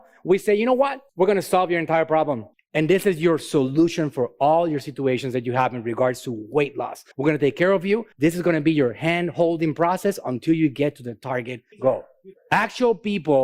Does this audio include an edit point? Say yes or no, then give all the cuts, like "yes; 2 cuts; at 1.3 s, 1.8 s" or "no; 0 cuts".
yes; 5 cuts; at 1.1 s, 2.5 s, 7.1 s, 8.1 s, 11.7 s